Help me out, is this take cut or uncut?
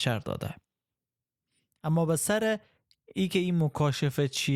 uncut